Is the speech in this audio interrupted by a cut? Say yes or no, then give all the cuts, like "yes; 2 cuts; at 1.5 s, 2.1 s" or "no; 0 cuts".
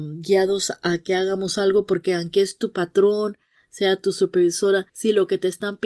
yes; 1 cut; at 4.9 s